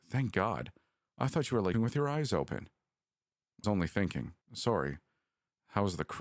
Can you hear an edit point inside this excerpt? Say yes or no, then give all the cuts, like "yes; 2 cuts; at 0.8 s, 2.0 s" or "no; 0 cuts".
yes; 3 cuts; at 1.7 s, 3.6 s, 4.4 s